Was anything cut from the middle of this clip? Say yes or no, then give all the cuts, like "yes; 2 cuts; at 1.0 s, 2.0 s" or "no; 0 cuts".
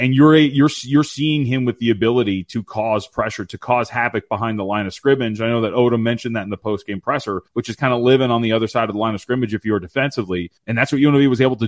yes; 2 cuts; at 7.5 s, 10.6 s